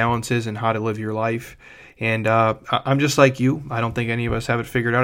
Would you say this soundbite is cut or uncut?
uncut